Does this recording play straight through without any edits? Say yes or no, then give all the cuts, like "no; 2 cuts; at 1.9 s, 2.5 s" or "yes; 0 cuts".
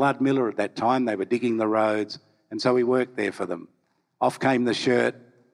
yes; 0 cuts